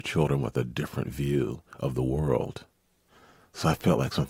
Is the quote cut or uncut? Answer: uncut